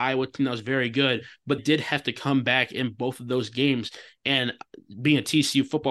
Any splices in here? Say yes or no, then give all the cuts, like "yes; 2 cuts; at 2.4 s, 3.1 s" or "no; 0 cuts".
yes; 1 cut; at 1.6 s